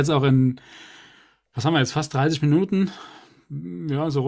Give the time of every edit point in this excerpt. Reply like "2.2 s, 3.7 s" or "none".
none